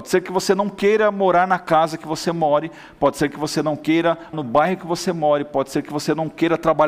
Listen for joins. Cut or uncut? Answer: cut